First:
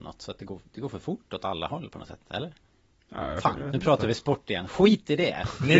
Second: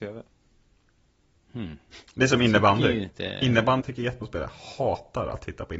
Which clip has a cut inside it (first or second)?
second